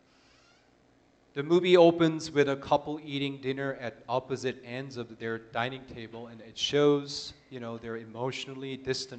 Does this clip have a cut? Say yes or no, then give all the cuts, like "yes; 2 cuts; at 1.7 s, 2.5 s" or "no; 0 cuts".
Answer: no; 0 cuts